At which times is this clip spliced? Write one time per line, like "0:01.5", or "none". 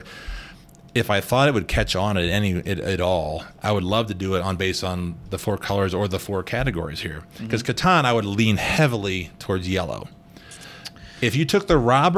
none